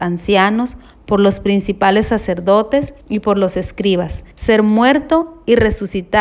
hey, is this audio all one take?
no; 2 cuts; at 3.0 s, 4.3 s

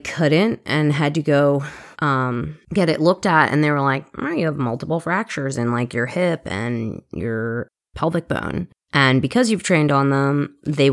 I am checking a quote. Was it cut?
yes; 2 cuts; at 1.9 s, 8.7 s

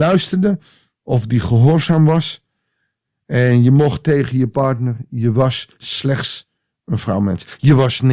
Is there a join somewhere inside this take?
yes; 1 cut; at 4.0 s

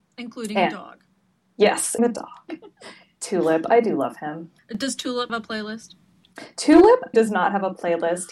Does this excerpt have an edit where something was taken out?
yes; 4 cuts; at 2.0 s, 4.6 s, 5.3 s, 7.1 s

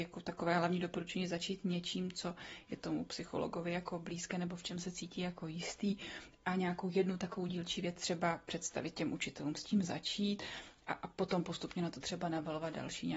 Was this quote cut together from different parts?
no; 0 cuts

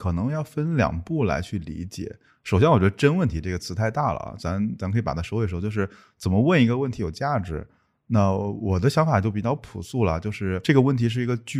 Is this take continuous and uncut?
yes; 0 cuts

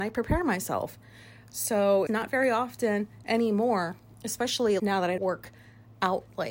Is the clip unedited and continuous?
no; 3 cuts; at 2.1 s, 4.8 s, 5.2 s

